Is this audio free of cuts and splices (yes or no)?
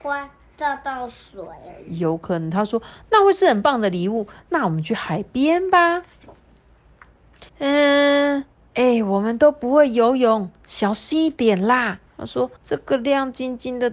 no